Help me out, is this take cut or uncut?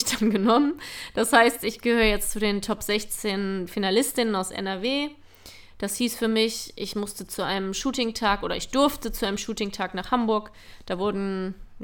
uncut